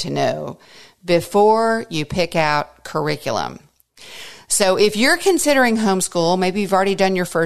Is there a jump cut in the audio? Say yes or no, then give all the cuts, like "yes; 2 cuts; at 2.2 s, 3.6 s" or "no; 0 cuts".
no; 0 cuts